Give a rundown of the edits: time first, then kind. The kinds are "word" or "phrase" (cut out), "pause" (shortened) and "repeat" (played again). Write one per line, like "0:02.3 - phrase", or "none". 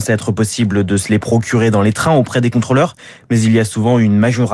none